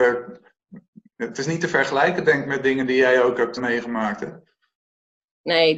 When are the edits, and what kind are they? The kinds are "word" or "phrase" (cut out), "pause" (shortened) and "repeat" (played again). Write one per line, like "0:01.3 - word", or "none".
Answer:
0:03.6 - word

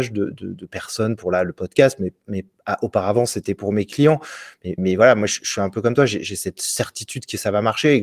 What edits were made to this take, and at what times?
0:04.8 - word

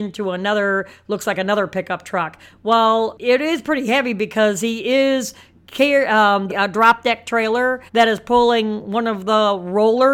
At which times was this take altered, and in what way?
0:06.5 - phrase
0:07.9 - pause

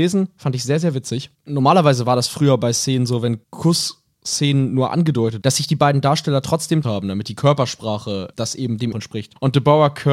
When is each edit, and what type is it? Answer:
0:03.4 - pause
0:05.4 - word
0:06.8 - phrase
0:08.9 - phrase

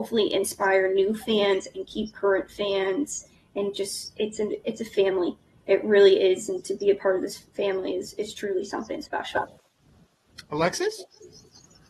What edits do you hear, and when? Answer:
none

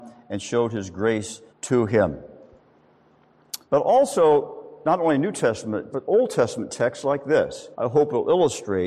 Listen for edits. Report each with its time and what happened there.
0:01.5 - pause
0:03.6 - pause
0:05.9 - word
0:07.7 - pause

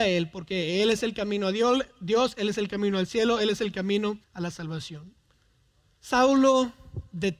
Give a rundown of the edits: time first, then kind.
0:04.2 - pause
0:05.3 - pause

